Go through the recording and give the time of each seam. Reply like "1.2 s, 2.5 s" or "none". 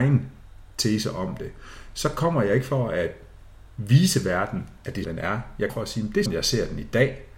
5.0 s, 5.7 s, 6.3 s

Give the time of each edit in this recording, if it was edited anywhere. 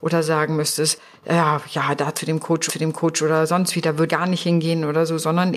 2.7 s, 4.1 s

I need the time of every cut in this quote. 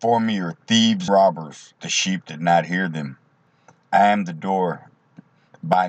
1.1 s, 1.8 s

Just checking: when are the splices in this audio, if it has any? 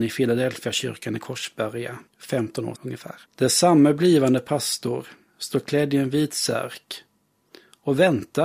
2.1 s, 2.8 s, 3.3 s

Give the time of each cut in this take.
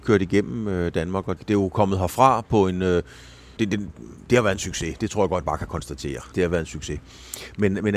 1.4 s, 3.6 s, 5.4 s, 6.3 s

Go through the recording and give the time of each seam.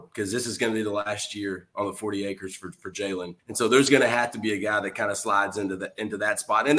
3.4 s

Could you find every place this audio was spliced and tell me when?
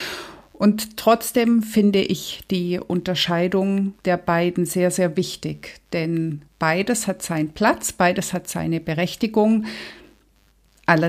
4.0 s, 6.5 s

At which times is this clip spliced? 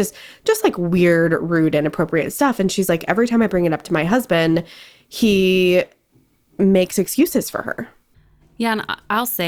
none

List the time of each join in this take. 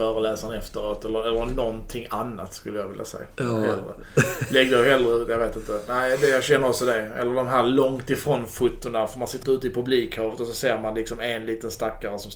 9.4 s

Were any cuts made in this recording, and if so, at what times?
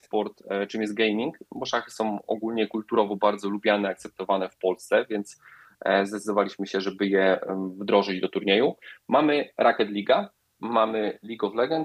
none

